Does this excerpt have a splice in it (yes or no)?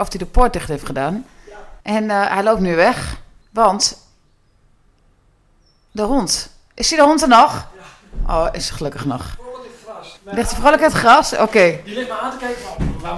yes